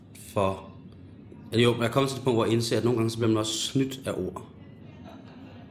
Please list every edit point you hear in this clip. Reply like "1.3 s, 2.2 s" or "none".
none